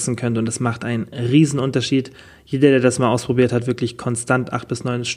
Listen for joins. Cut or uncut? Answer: uncut